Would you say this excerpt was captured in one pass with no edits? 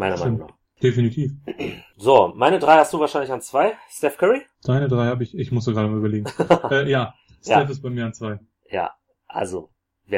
yes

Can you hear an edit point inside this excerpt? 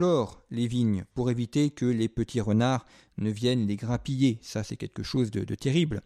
no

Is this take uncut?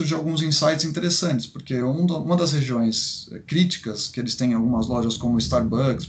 yes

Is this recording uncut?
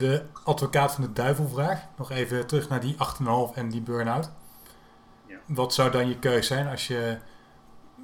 yes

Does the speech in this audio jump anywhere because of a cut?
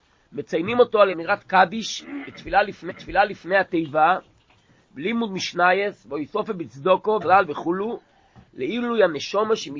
yes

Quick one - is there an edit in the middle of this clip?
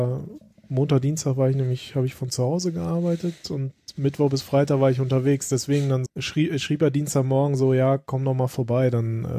yes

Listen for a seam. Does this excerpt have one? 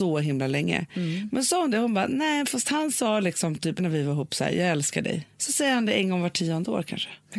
yes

